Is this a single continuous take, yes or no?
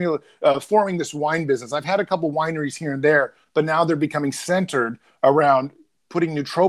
yes